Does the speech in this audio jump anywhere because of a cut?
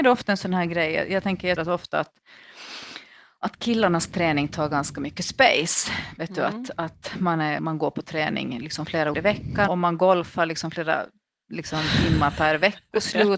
yes; 4 cuts; at 1.6 s, 7.6 s, 9.1 s, 9.7 s

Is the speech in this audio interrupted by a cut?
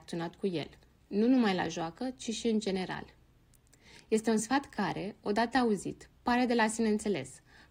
no; 0 cuts

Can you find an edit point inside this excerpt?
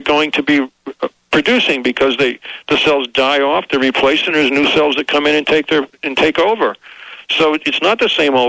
no; 0 cuts

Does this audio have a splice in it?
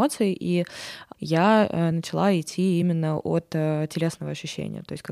no; 0 cuts

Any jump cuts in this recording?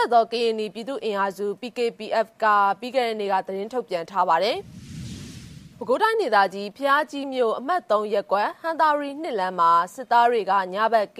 no; 0 cuts

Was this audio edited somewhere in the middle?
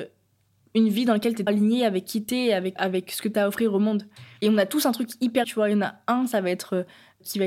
yes; 3 cuts; at 1.5 s, 2.8 s, 5.4 s

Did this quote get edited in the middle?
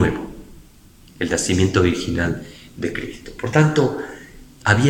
no; 0 cuts

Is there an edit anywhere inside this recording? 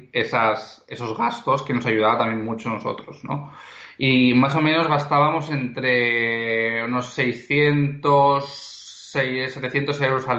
no; 0 cuts

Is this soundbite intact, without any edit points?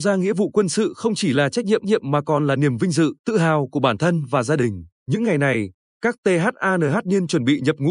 no; 3 cuts; at 1.8 s, 3.2 s, 4.9 s

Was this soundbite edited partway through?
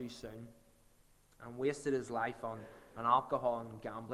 no; 0 cuts

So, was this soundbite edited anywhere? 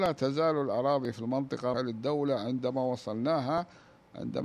yes; 1 cut; at 1.7 s

